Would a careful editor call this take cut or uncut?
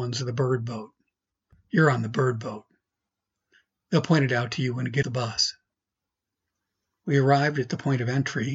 cut